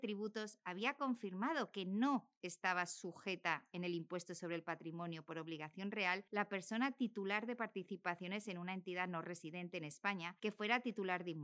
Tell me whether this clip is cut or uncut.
uncut